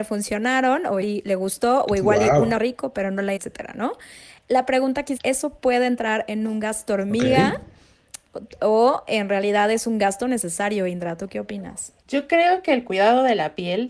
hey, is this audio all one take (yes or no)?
no